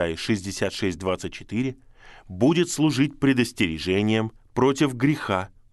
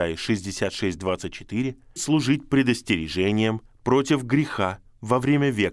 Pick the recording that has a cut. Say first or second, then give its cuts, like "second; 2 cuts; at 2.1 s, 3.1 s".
second; 1 cut; at 2.0 s